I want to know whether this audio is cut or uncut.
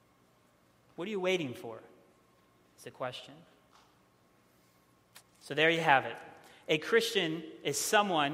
uncut